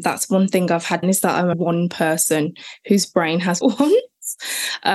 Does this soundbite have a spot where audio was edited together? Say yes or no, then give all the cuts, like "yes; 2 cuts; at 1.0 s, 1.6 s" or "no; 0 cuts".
yes; 3 cuts; at 1.0 s, 1.5 s, 3.6 s